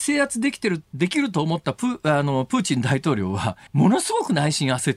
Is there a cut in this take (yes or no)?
yes